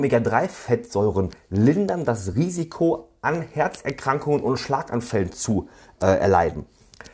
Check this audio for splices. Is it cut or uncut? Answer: uncut